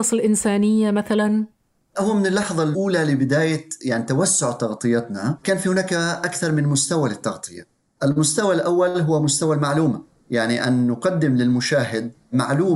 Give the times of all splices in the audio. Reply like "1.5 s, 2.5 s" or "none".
none